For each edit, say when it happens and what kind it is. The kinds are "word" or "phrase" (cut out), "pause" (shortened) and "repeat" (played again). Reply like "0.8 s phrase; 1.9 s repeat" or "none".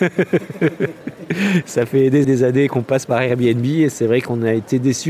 2.2 s word

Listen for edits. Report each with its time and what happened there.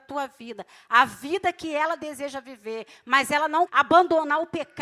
3.7 s word

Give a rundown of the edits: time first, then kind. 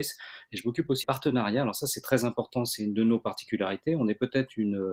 1.0 s word

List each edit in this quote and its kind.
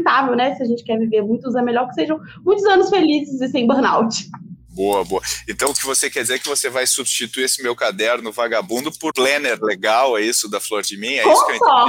1.5 s word; 9.1 s word

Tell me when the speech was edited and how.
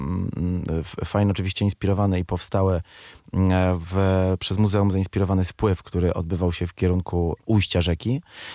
none

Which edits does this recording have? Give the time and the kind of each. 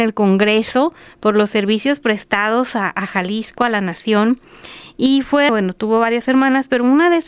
5.5 s word

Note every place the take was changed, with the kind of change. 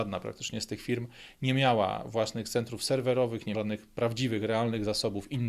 3.5 s word

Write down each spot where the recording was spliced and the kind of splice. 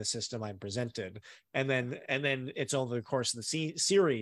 none

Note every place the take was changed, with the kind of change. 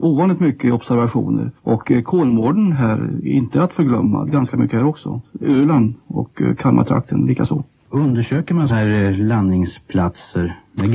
1.6 s pause; 4.3 s word; 8.7 s word

